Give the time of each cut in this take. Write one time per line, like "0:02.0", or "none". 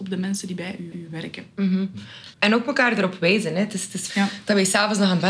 0:00.9
0:02.3
0:04.1